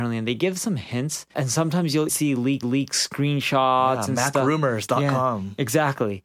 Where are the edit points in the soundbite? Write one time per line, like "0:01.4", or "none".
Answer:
0:01.3
0:02.1
0:02.6